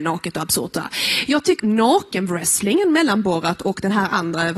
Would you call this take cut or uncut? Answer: cut